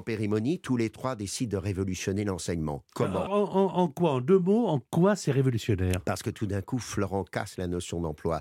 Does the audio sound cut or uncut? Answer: cut